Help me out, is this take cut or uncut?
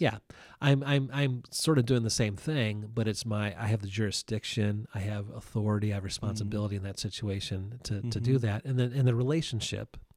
uncut